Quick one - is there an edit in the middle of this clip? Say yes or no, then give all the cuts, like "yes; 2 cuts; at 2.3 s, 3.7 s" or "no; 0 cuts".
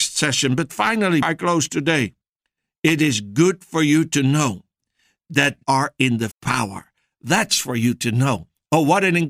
yes; 3 cuts; at 1.2 s, 5.6 s, 6.3 s